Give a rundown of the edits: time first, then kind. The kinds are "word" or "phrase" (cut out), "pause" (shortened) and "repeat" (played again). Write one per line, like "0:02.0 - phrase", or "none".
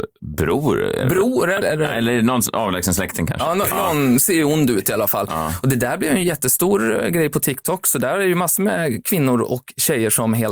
0:01.6 - word